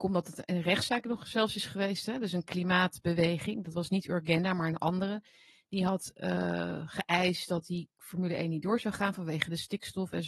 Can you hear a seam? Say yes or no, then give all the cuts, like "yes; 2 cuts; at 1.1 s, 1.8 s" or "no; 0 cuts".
no; 0 cuts